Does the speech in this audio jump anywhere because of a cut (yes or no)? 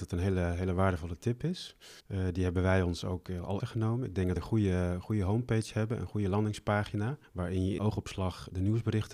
yes